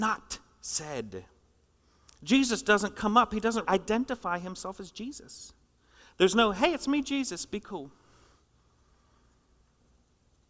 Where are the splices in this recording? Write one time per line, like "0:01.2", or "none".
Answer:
0:03.6